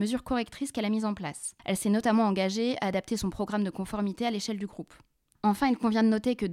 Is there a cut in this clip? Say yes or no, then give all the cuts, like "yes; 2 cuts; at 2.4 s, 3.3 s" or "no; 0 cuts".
no; 0 cuts